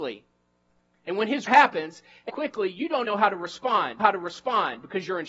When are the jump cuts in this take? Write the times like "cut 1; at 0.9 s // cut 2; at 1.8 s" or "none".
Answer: cut 1; at 1.5 s // cut 2; at 2.3 s // cut 3; at 3.0 s // cut 4; at 4.0 s